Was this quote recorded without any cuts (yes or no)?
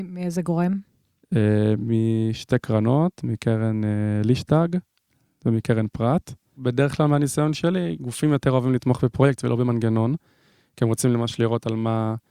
yes